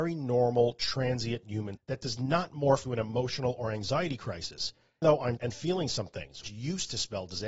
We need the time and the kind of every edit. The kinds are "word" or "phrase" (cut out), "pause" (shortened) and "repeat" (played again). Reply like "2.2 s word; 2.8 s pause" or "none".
1.7 s word; 2.8 s word; 5.0 s word; 5.4 s word; 6.4 s word